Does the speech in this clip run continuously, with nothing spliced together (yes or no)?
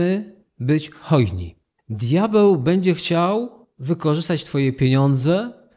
yes